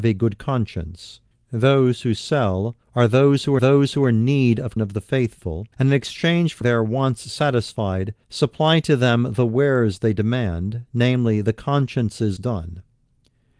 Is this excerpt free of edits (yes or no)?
no